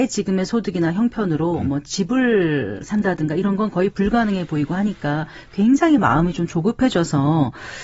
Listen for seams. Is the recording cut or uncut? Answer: uncut